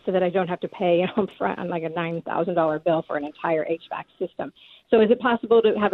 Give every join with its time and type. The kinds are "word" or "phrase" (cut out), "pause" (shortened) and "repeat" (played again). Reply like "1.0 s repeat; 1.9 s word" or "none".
none